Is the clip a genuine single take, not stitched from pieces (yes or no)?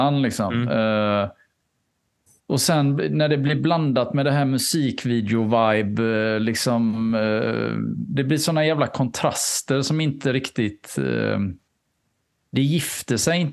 yes